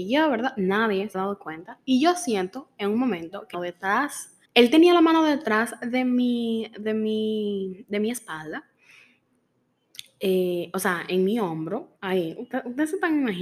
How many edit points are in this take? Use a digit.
4